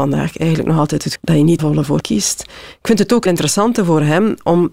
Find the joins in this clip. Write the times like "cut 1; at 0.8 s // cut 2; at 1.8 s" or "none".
cut 1; at 1.1 s // cut 2; at 1.6 s // cut 3; at 2.0 s // cut 4; at 3.3 s